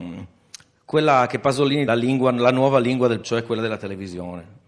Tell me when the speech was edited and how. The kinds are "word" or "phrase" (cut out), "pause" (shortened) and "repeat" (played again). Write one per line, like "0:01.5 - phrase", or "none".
0:01.9 - phrase
0:03.2 - word

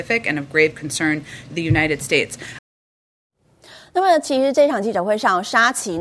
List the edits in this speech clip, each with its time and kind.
0:01.5 - word

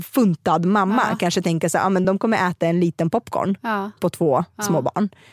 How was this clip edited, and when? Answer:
none

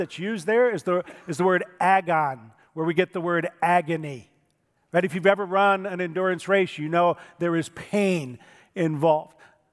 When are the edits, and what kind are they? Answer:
none

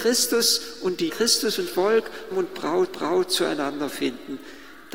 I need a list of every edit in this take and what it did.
0:01.1 - word
0:01.7 - word
0:02.3 - word
0:02.9 - repeat

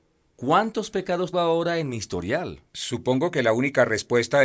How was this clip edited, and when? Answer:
0:01.3 - word
0:02.7 - pause

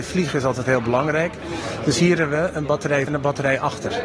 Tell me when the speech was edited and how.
0:03.1 - phrase

